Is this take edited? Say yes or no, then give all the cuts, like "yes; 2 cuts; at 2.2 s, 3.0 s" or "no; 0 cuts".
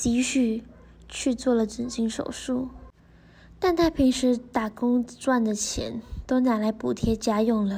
no; 0 cuts